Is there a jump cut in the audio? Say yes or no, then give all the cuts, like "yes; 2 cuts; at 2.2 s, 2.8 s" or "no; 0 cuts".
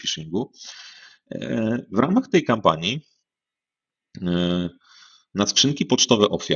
no; 0 cuts